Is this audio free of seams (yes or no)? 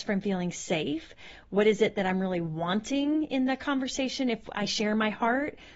yes